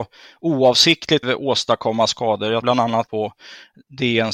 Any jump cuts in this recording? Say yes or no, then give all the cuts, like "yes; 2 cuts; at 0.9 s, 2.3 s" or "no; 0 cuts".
yes; 3 cuts; at 1.2 s, 2.6 s, 3.1 s